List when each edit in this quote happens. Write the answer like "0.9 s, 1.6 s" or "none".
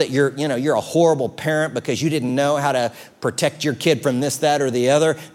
none